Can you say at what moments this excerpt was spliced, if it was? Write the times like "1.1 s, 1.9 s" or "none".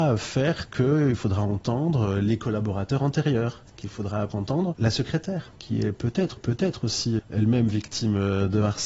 4.3 s, 5.6 s, 6.4 s